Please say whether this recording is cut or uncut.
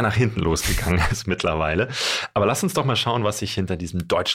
uncut